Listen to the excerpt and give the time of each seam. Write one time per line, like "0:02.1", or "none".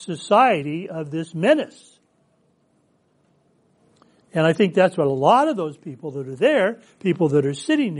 none